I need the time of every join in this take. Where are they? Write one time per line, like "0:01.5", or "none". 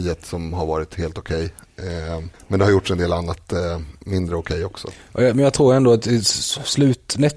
0:02.3